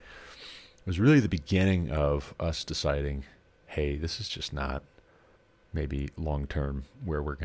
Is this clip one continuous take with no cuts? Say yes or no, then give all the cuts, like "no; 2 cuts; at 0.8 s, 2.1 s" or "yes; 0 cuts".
yes; 0 cuts